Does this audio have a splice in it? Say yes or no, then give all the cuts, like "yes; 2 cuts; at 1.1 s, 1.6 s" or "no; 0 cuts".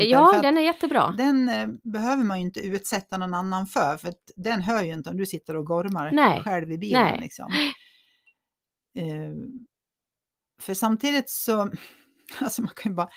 no; 0 cuts